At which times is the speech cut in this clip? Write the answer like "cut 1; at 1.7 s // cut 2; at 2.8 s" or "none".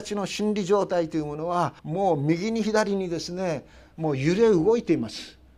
cut 1; at 1.8 s